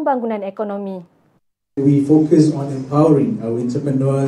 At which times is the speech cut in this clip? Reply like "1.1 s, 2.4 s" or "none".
1.4 s